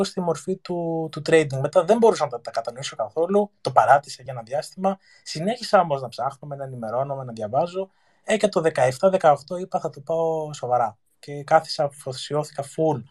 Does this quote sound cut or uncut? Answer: uncut